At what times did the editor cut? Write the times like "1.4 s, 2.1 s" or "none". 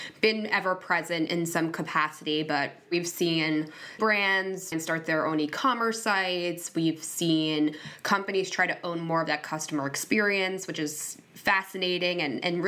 1.3 s, 4.0 s, 4.7 s